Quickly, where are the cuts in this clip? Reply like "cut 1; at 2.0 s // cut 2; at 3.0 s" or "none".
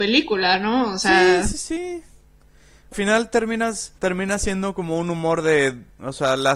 cut 1; at 2.9 s // cut 2; at 4.0 s